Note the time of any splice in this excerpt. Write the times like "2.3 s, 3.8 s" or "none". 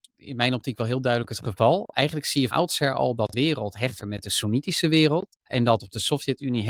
2.5 s, 3.3 s, 4.0 s, 5.3 s, 5.8 s